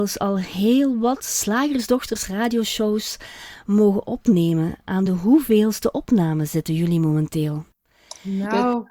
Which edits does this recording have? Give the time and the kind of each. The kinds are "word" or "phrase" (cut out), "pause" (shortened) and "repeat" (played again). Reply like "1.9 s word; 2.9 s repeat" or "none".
none